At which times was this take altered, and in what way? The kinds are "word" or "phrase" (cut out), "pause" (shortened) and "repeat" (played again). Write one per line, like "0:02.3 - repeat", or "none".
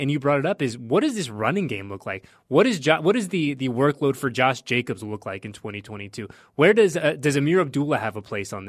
none